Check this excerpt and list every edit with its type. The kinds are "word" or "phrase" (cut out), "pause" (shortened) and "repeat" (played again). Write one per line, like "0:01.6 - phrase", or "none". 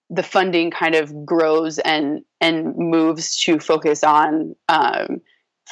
none